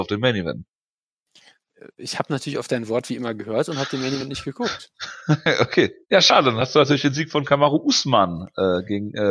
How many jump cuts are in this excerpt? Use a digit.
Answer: 1